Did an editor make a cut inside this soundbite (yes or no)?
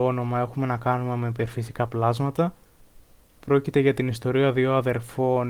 no